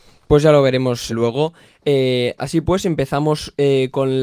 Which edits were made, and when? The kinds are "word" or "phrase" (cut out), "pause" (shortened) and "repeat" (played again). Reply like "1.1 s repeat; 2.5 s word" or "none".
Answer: 1.1 s word

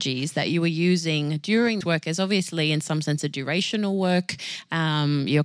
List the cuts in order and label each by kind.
1.8 s word

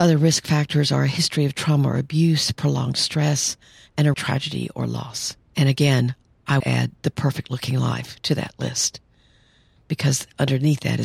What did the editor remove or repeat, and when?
4.1 s word; 5.5 s pause; 6.6 s word

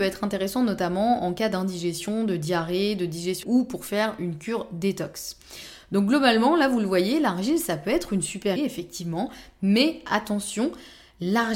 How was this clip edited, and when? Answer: 3.4 s word; 8.6 s word

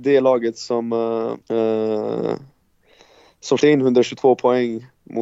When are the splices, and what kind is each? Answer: 1.4 s pause; 3.6 s word

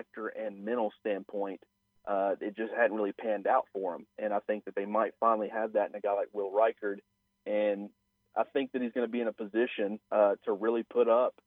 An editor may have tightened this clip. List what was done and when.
10.0 s pause

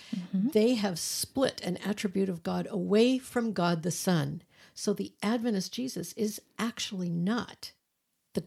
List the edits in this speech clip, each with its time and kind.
none

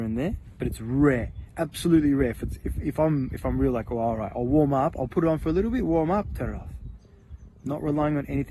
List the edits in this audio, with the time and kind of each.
2.6 s word; 4.3 s word

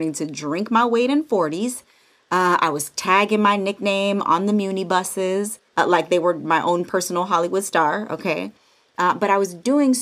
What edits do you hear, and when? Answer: 5.7 s pause

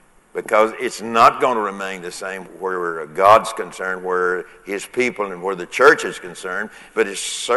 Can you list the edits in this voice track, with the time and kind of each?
2.5 s word

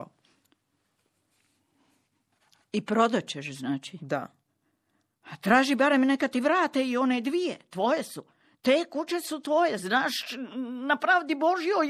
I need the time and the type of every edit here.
none

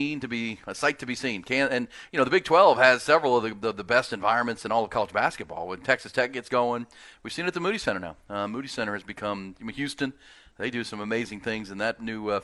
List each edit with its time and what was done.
none

